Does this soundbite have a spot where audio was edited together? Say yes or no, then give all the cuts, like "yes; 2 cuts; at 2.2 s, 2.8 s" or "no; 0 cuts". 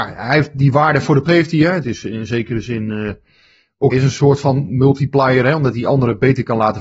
yes; 3 cuts; at 1.3 s, 1.8 s, 3.9 s